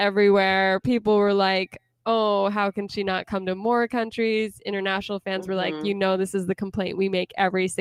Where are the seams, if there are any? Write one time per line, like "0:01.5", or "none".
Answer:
none